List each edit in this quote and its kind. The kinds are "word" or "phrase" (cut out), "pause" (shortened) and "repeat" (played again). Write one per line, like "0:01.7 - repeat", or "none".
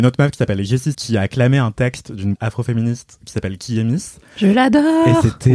0:00.9 - word
0:02.4 - word